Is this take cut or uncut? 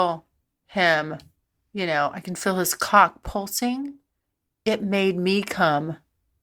uncut